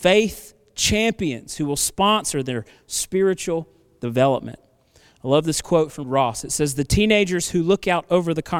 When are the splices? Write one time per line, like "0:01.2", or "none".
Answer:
0:06.0